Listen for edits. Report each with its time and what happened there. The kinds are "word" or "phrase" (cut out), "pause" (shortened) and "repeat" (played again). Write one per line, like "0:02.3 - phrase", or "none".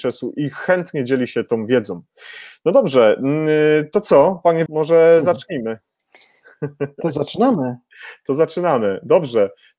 0:04.7 - word

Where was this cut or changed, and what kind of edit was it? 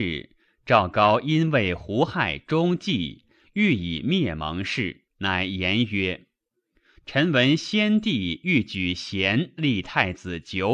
0:05.1 - pause

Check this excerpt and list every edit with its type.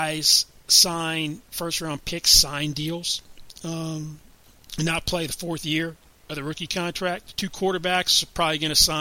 none

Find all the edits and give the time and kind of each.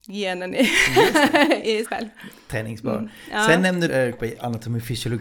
0:01.8 - word
0:03.9 - word
0:04.2 - word

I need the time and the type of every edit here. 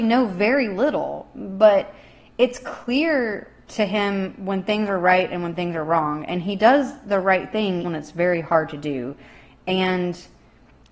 0:07.8 - word

